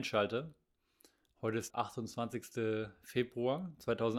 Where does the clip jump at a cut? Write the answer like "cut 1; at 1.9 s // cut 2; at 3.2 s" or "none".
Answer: cut 1; at 1.7 s